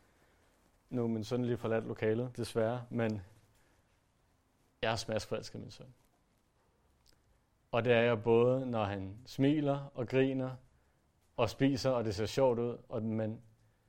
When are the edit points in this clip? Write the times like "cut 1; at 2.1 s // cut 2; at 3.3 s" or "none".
none